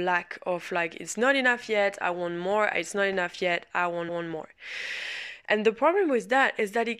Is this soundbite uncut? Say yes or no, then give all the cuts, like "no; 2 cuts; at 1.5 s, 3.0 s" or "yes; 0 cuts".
no; 1 cut; at 4.1 s